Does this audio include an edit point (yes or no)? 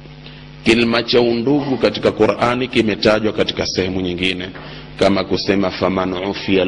no